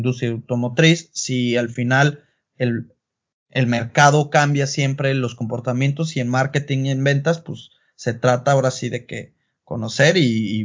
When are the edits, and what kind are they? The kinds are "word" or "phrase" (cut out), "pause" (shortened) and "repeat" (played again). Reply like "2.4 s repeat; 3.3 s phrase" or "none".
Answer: none